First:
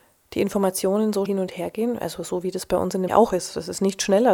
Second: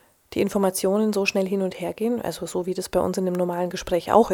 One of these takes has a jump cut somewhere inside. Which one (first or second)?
first